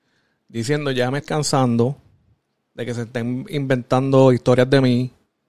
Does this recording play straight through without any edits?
no; 1 cut; at 1.2 s

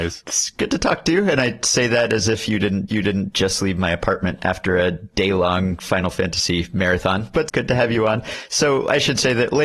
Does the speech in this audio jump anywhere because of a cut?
yes; 2 cuts; at 2.9 s, 7.5 s

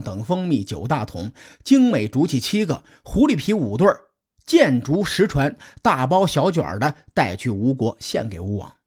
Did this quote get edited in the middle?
no; 0 cuts

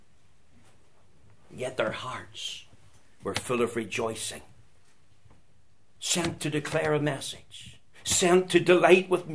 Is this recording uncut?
yes; 0 cuts

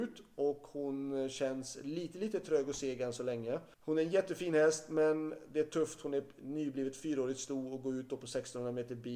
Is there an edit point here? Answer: yes; 1 cut; at 3.7 s

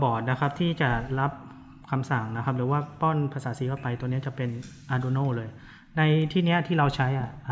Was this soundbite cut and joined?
no; 0 cuts

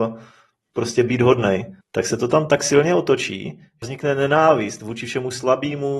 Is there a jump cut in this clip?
yes; 2 cuts; at 1.8 s, 3.8 s

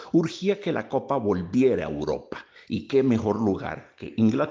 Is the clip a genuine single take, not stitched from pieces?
yes; 0 cuts

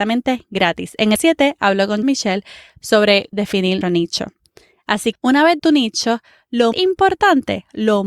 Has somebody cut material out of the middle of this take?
yes; 7 cuts; at 1.1 s, 2.0 s, 3.3 s, 3.8 s, 5.1 s, 5.6 s, 6.7 s

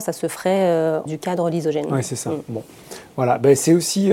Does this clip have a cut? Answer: yes; 1 cut; at 1.1 s

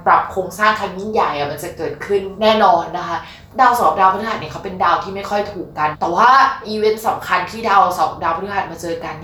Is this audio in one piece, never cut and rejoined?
yes; 0 cuts

